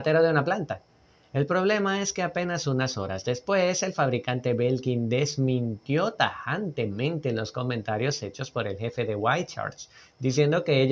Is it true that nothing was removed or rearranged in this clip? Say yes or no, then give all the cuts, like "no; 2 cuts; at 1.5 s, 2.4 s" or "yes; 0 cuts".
yes; 0 cuts